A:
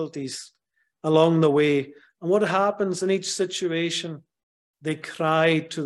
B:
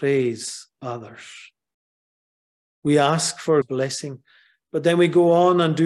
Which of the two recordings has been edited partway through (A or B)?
B